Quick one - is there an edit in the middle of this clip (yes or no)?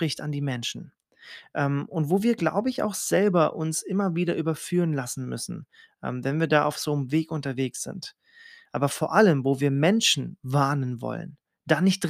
no